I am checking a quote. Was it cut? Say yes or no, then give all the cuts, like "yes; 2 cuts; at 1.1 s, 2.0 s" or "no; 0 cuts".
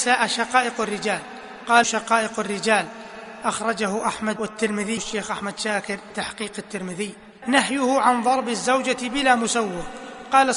yes; 5 cuts; at 1.8 s, 4.4 s, 5.0 s, 6.1 s, 7.4 s